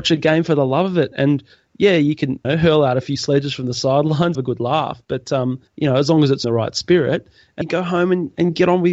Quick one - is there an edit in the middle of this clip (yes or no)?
yes